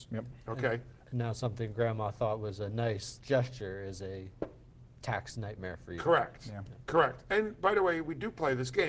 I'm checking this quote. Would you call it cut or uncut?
cut